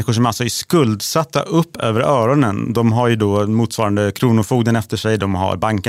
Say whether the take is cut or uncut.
uncut